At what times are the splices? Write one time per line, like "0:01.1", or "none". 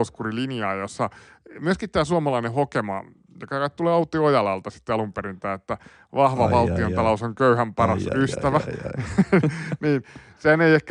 none